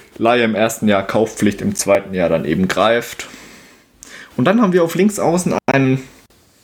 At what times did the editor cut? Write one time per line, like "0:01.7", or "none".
none